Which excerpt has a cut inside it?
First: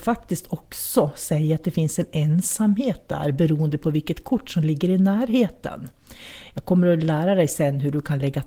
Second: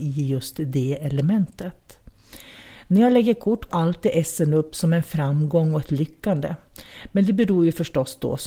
second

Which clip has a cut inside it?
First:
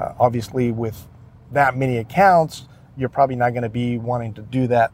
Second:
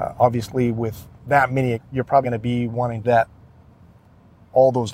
second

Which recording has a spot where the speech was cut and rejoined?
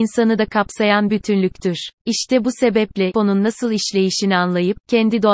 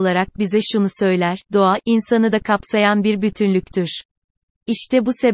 first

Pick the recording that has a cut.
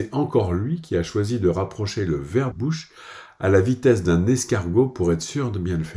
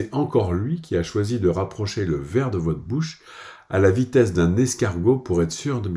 first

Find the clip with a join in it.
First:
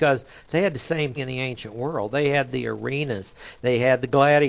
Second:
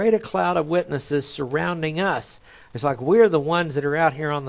first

